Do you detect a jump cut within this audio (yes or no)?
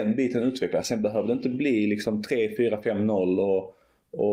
no